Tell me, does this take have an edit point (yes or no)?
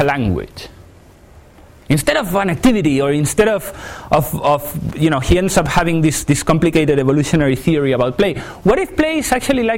no